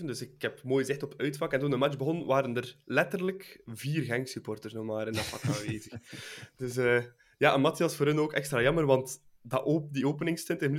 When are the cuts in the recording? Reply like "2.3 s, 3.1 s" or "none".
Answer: none